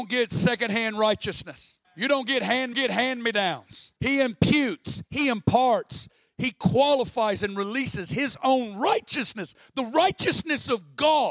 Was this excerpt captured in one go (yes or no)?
no